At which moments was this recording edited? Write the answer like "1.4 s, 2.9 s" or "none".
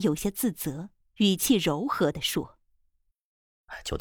1.0 s